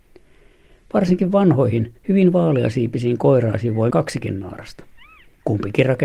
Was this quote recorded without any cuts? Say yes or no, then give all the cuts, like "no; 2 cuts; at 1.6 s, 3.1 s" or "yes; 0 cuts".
no; 2 cuts; at 2.0 s, 3.9 s